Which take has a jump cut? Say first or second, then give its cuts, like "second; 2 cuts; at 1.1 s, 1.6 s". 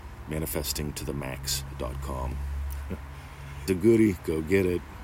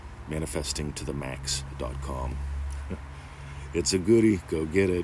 first; 1 cut; at 3.7 s